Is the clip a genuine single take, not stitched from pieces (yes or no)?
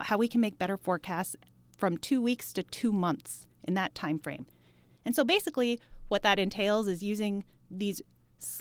yes